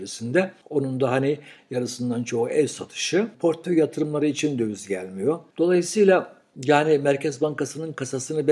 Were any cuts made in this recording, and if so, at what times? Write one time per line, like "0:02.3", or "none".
none